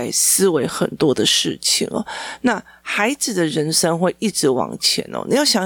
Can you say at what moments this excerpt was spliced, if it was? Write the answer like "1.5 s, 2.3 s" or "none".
none